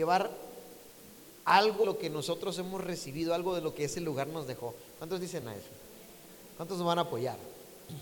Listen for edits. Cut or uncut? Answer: cut